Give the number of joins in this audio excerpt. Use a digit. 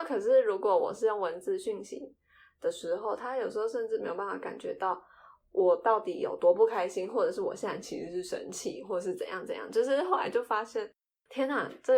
0